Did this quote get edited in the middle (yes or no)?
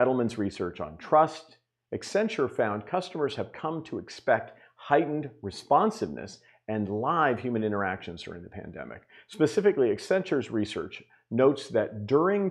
no